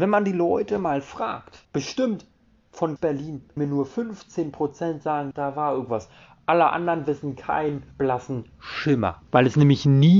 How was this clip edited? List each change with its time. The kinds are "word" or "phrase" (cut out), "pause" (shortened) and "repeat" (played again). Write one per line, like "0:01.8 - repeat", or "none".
0:01.6 - pause
0:03.0 - word
0:03.6 - word
0:05.3 - word
0:07.9 - pause
0:09.3 - word